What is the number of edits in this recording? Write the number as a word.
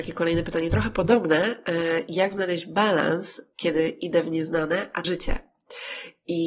one